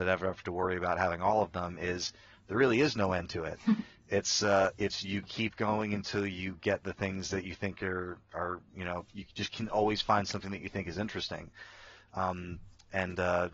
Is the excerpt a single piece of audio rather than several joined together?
yes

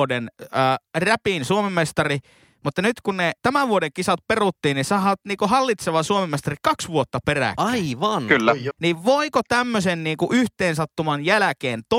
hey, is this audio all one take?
no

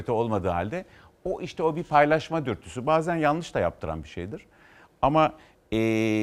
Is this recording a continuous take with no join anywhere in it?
yes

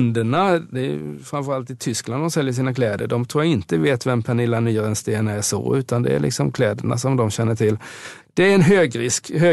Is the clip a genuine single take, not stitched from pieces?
yes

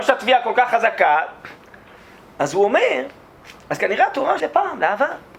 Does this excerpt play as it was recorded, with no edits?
no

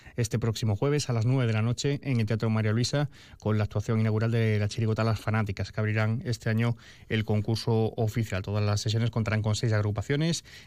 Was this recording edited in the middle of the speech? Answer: no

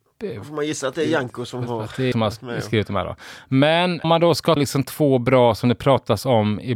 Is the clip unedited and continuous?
no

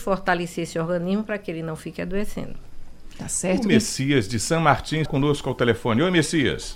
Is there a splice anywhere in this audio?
yes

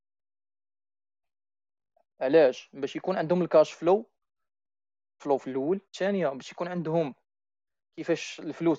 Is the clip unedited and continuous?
no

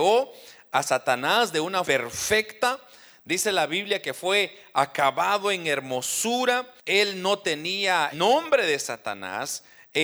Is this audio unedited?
no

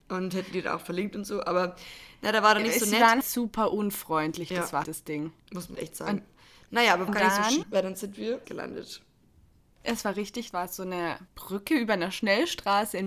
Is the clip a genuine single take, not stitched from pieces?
no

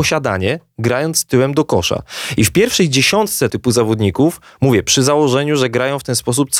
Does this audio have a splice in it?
yes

